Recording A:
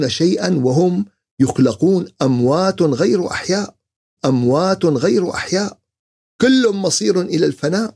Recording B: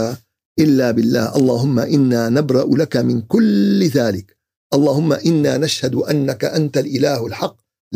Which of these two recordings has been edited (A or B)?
A